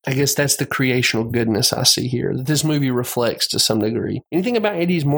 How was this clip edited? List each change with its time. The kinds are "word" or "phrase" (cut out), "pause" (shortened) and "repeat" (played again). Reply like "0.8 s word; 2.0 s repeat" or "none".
none